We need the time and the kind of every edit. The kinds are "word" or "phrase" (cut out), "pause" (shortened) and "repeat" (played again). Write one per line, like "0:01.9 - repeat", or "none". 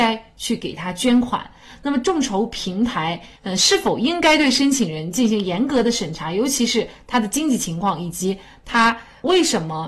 0:03.4 - pause